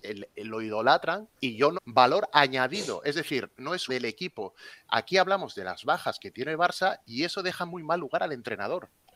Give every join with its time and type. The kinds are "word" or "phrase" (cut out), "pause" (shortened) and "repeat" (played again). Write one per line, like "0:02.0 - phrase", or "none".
0:01.4 - pause
0:01.7 - phrase
0:03.9 - phrase